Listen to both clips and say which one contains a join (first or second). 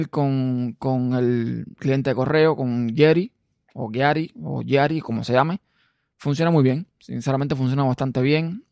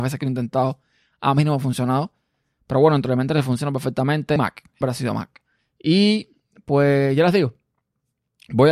second